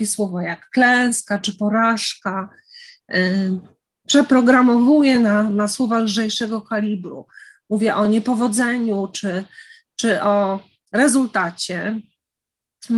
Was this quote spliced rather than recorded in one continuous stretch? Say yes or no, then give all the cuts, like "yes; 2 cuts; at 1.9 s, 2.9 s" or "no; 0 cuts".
no; 0 cuts